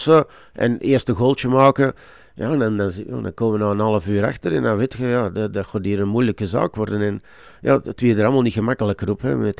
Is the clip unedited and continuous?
yes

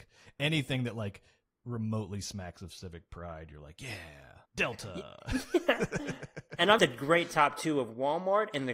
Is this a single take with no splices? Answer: no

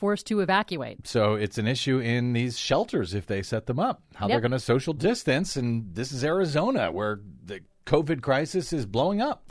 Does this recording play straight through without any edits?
yes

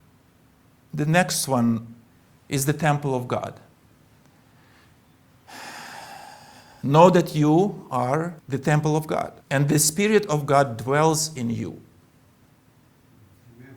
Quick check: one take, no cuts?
no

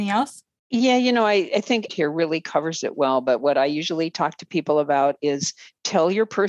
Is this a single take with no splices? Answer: no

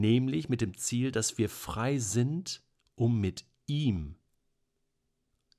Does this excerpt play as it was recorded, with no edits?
yes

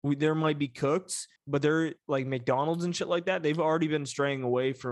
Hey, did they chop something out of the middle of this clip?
yes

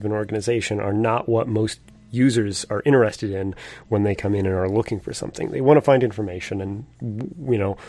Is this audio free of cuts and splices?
yes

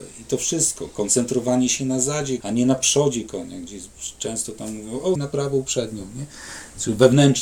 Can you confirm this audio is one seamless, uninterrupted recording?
no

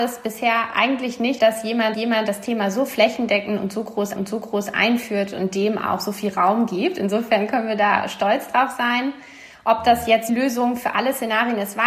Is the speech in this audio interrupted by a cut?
yes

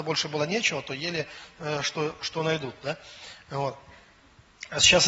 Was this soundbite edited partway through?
no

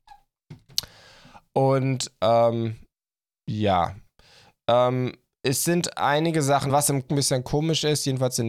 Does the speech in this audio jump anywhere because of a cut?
yes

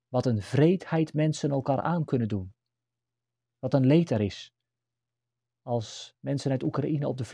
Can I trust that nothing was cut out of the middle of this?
yes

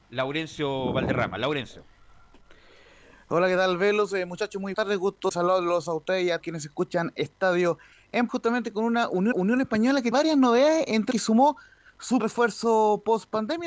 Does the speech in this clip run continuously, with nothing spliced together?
no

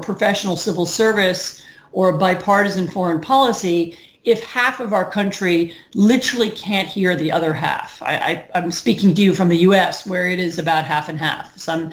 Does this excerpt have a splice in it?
no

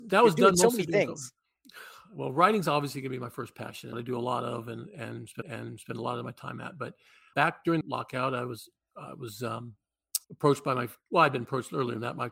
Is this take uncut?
no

